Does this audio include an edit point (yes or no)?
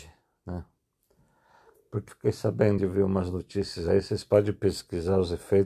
yes